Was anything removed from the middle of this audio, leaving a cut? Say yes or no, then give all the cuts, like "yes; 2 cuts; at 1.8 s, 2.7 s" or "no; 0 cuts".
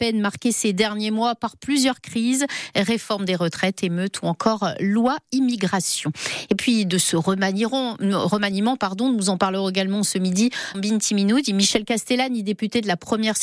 yes; 1 cut; at 10.7 s